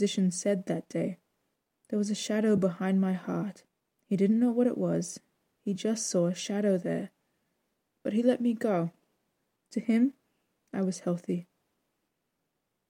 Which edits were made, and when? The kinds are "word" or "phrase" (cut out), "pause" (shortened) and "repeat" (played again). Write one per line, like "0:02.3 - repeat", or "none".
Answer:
none